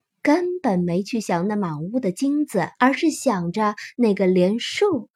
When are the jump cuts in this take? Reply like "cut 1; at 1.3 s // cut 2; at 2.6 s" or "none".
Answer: cut 1; at 2.7 s